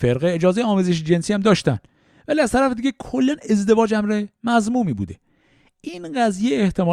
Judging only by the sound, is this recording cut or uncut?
uncut